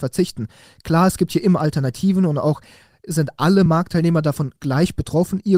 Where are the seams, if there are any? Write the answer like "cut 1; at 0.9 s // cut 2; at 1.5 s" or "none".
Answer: none

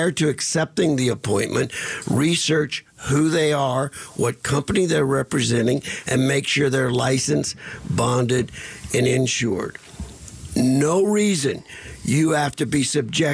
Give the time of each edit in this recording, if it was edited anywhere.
none

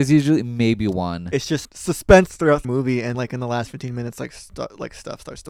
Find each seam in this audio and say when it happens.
cut 1; at 1.6 s // cut 2; at 2.6 s // cut 3; at 3.1 s

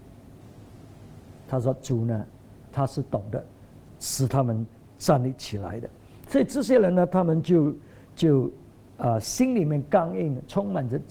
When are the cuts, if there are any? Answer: cut 1; at 1.4 s

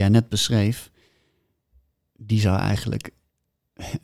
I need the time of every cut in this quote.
none

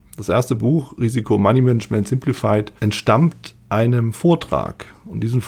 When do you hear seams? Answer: cut 1; at 2.8 s

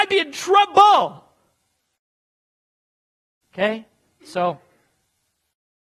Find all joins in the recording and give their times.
none

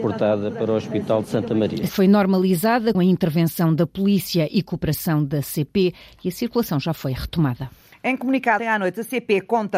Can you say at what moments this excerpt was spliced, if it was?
cut 1; at 1.9 s // cut 2; at 2.9 s // cut 3; at 8.6 s

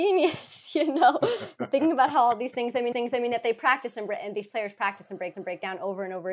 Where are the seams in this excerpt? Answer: cut 1; at 2.9 s // cut 2; at 5.3 s

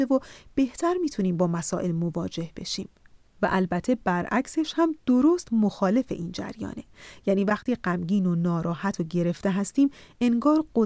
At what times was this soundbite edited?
none

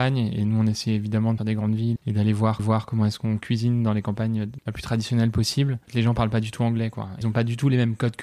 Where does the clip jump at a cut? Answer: cut 1; at 1.4 s // cut 2; at 2.0 s // cut 3; at 2.6 s // cut 4; at 4.6 s // cut 5; at 5.8 s // cut 6; at 7.2 s

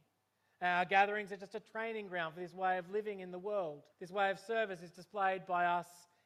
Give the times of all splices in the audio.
cut 1; at 3.9 s

